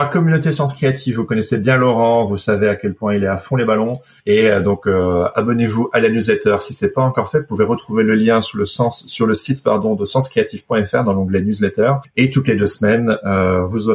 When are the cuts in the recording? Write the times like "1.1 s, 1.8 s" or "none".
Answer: none